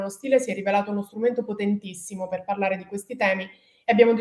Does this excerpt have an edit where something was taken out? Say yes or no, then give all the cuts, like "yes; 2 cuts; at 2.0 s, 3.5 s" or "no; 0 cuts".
no; 0 cuts